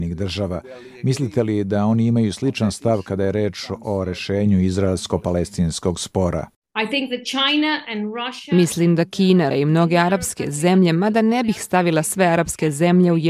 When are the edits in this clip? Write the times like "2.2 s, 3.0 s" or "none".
9.5 s